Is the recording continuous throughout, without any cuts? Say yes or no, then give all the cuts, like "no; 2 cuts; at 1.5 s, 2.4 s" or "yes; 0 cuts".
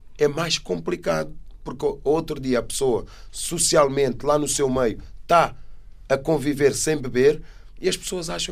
yes; 0 cuts